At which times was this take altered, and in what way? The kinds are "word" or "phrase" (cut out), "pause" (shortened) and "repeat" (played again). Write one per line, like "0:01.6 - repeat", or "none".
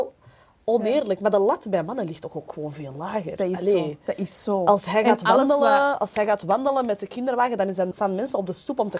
0:07.9 - word